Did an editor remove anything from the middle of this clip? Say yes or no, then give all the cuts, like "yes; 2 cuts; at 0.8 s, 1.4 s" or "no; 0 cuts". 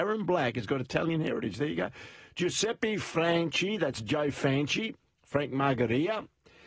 no; 0 cuts